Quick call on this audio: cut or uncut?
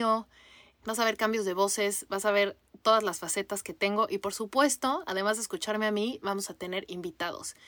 uncut